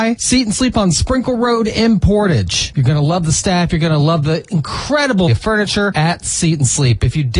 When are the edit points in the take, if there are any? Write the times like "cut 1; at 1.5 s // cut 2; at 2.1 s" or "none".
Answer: cut 1; at 5.3 s